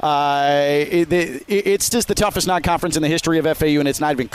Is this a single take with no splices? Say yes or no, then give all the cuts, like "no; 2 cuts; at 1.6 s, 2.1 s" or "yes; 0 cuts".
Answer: no; 1 cut; at 1.9 s